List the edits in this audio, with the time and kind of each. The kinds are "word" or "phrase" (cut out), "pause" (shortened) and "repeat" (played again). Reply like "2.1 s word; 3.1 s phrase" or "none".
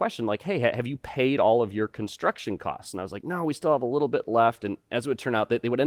none